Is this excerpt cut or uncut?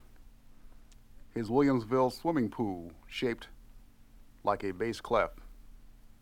uncut